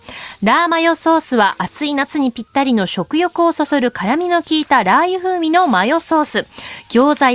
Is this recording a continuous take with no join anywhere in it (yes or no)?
yes